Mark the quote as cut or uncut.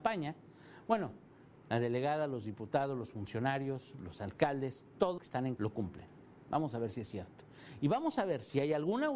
cut